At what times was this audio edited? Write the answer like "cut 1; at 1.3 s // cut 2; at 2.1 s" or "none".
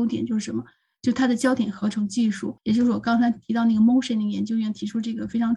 cut 1; at 2.6 s